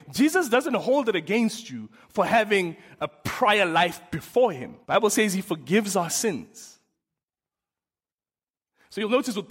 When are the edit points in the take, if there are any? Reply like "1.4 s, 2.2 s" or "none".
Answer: 4.8 s

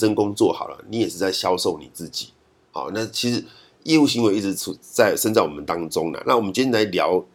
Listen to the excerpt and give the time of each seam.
none

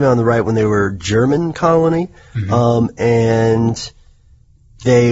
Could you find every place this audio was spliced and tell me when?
none

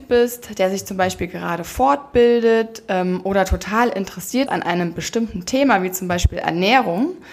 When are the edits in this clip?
4.5 s

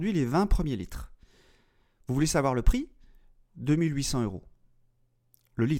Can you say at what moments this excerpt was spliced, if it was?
none

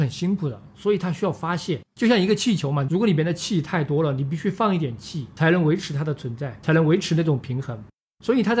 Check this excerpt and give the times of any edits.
1.8 s

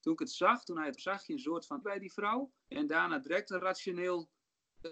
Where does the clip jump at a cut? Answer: 1.0 s, 1.8 s, 2.6 s

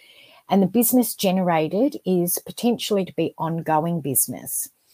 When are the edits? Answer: 3.1 s

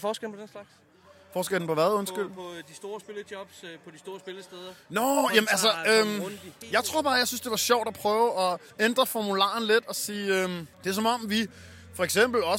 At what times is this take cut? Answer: 8.7 s, 10.7 s

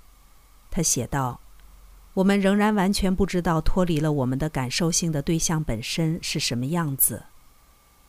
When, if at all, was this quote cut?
none

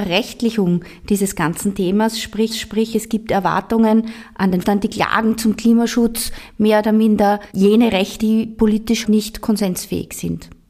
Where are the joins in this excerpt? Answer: 2.5 s, 4.6 s, 7.5 s, 8.2 s, 9.0 s

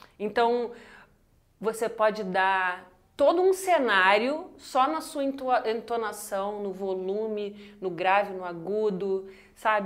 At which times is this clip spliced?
none

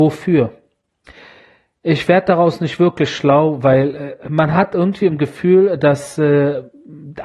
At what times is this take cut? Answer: none

